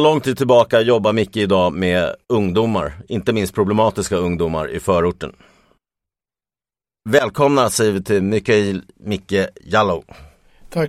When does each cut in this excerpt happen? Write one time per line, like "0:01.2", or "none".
none